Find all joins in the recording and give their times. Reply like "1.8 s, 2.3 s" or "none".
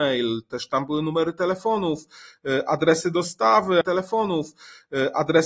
3.8 s